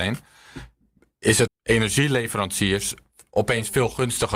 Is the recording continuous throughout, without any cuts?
no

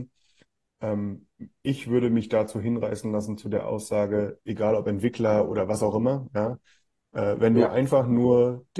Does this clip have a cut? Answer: no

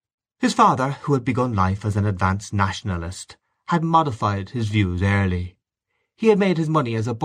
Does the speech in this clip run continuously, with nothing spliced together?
yes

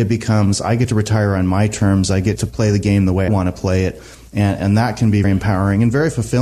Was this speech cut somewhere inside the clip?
yes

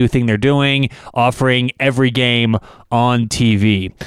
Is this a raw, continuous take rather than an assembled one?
yes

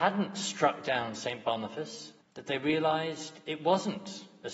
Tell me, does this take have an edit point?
yes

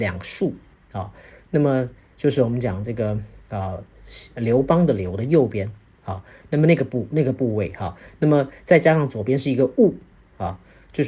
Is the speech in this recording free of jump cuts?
yes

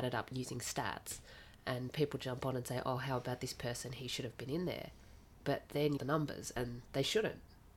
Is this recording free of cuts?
no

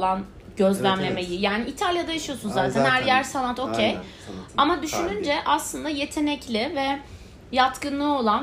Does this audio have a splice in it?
no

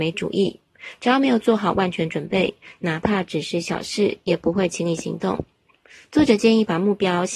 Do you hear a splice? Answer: no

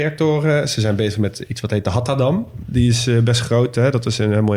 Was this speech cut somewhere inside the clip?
no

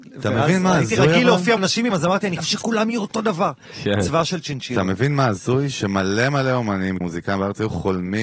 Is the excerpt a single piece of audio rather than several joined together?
no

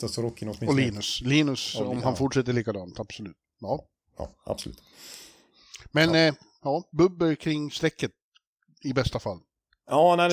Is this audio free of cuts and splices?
yes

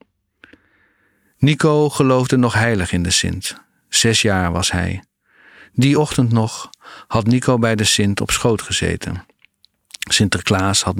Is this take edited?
no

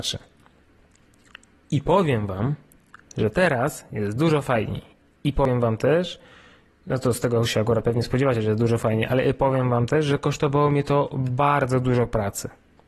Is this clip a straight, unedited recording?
yes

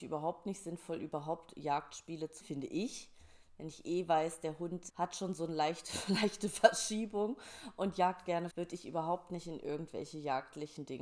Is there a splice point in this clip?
yes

